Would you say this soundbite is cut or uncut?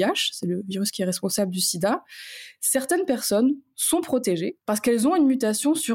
uncut